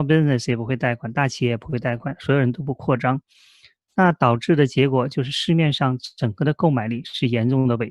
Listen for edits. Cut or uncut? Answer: uncut